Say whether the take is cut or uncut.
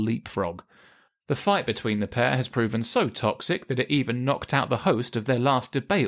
uncut